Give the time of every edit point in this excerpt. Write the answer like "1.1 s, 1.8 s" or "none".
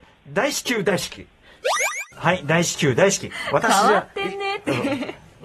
2.1 s

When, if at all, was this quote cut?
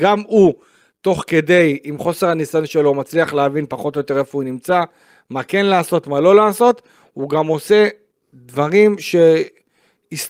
none

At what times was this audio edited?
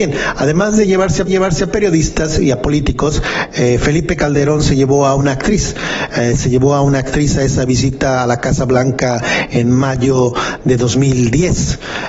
1.3 s

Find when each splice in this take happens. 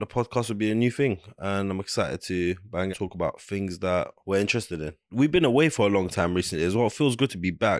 2.9 s

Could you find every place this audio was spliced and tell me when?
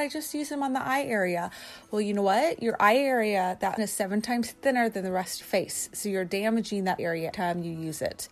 3.8 s, 5.4 s, 7.0 s, 7.3 s

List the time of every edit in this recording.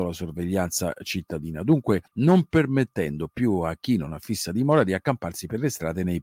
2.1 s

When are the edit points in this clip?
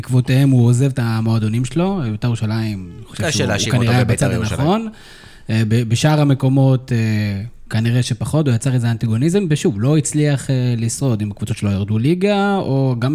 none

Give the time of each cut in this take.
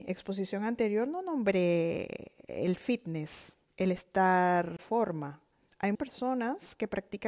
4.8 s, 5.9 s

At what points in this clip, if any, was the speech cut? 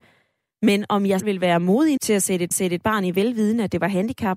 1.2 s, 2.0 s, 2.5 s, 3.1 s

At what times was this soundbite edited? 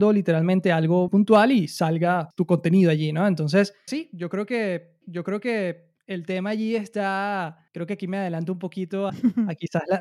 1.1 s, 3.9 s, 5.0 s, 7.7 s, 9.1 s

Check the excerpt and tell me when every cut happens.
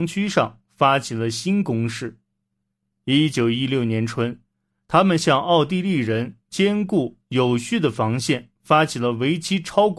none

